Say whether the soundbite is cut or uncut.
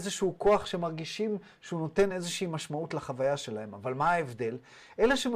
uncut